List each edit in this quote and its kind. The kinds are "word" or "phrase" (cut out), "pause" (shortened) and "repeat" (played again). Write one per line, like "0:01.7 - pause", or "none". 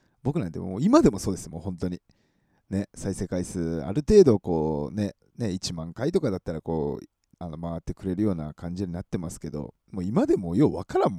0:05.2 - pause
0:07.3 - word